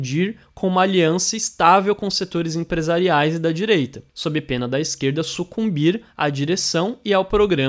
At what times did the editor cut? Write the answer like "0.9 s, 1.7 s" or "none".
4.1 s